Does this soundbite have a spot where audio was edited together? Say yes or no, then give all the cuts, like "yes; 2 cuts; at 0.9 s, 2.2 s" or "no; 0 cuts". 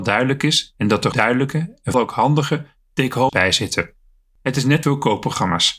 yes; 4 cuts; at 1.1 s, 1.9 s, 3.3 s, 4.8 s